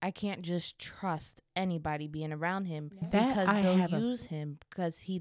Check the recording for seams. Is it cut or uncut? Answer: cut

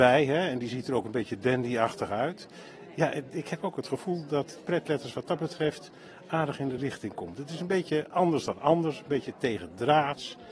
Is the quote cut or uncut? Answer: uncut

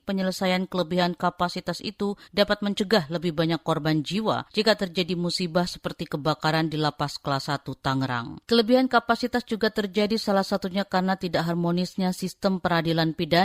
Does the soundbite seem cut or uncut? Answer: cut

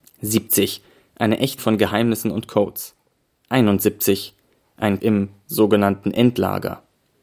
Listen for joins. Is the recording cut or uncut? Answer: cut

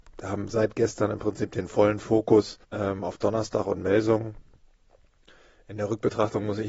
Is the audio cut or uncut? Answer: cut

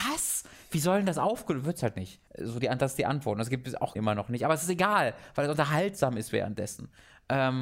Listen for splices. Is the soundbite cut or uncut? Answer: cut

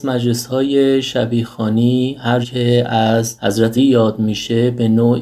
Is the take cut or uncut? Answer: cut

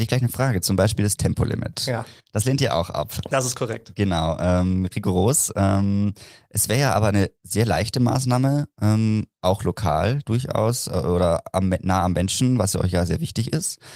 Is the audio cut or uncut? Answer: uncut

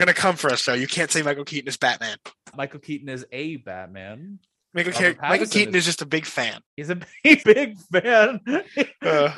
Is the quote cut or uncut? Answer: cut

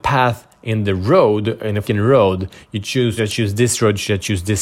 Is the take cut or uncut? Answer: cut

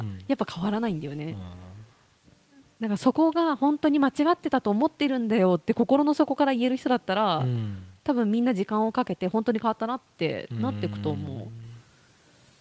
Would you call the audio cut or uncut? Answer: uncut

